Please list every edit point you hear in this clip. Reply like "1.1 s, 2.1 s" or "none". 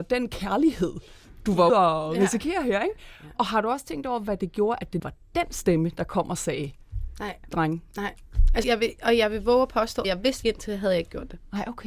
1.7 s, 5.0 s, 8.6 s, 10.0 s, 10.4 s